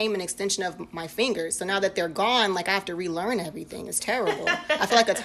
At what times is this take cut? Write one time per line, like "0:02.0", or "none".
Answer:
none